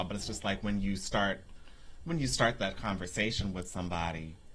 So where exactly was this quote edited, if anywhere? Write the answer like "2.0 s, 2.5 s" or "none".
none